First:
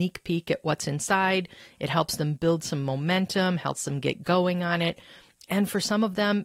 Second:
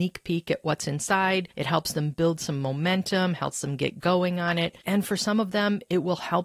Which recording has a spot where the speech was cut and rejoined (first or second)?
second